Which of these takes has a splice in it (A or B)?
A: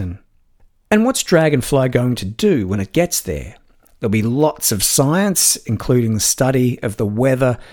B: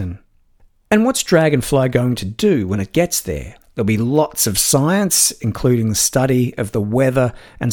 B